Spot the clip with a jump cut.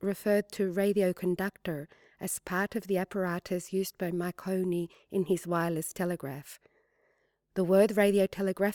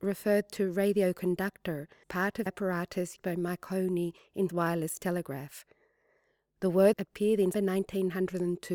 second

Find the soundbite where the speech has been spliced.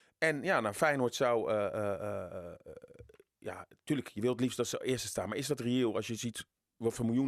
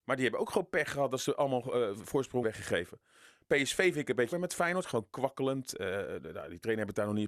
second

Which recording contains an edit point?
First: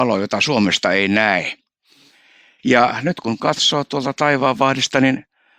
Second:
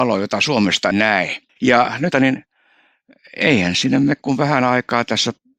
second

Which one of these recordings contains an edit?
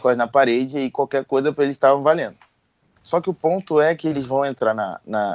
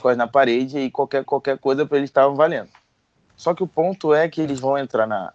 second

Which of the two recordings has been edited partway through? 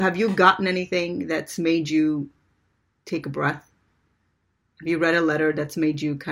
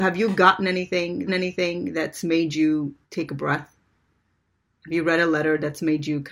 second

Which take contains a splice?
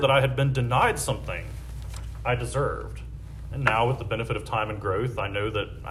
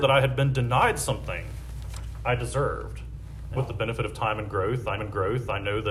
second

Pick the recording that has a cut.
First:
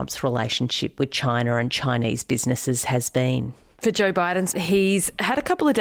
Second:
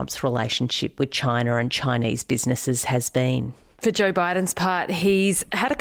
first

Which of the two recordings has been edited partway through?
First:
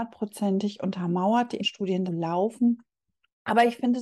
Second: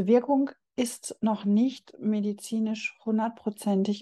first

